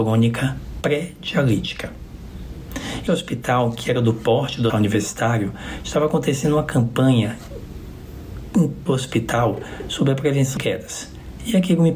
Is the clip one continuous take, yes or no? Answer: no